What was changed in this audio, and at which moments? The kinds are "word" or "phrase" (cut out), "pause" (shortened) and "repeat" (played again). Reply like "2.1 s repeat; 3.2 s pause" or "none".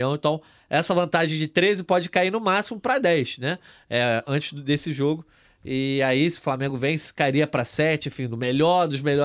none